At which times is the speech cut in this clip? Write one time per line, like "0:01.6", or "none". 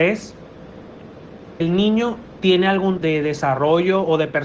0:01.6
0:03.0